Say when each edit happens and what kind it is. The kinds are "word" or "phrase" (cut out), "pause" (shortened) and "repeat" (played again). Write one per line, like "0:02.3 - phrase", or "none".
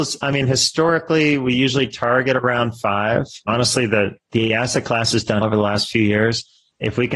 0:05.4 - word